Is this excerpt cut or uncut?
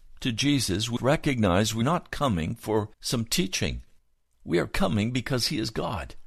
cut